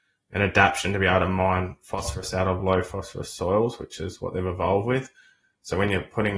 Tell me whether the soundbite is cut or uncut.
uncut